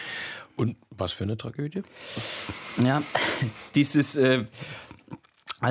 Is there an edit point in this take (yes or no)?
no